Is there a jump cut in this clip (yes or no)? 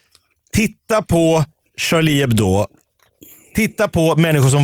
no